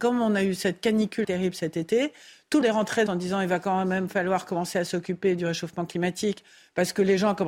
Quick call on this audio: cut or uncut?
cut